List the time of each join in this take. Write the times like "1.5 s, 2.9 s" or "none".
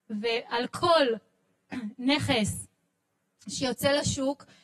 none